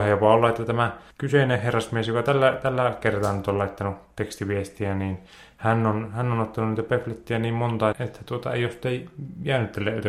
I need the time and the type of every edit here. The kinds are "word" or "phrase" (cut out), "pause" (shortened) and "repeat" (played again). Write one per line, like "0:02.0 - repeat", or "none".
0:01.1 - pause
0:07.9 - word